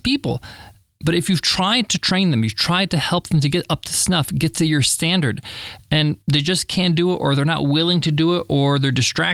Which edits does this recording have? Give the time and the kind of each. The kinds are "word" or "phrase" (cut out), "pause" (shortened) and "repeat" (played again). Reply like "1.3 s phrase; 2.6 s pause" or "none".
6.2 s pause